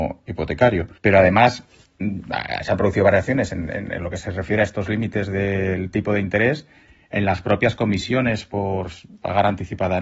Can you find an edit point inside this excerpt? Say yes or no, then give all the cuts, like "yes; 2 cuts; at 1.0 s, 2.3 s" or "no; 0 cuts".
yes; 1 cut; at 1.0 s